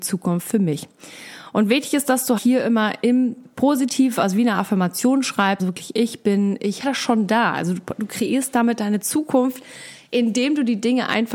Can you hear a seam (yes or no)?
yes